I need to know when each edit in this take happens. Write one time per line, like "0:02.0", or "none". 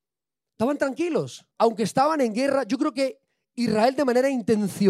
0:01.5